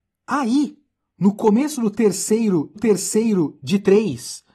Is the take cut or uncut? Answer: cut